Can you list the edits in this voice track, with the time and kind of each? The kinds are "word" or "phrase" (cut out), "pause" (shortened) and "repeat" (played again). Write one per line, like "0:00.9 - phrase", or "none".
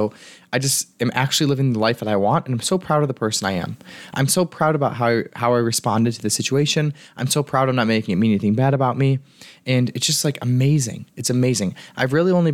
0:11.1 - pause